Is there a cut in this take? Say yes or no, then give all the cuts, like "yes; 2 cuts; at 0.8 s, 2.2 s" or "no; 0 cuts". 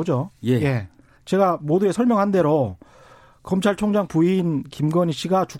no; 0 cuts